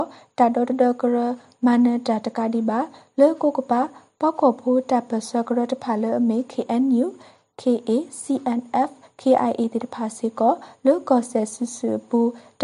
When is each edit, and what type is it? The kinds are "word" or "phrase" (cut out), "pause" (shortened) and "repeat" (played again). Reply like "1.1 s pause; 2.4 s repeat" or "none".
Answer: none